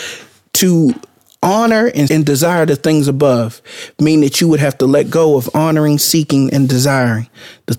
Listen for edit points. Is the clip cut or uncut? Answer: cut